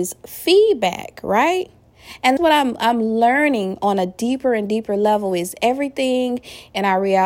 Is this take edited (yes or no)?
yes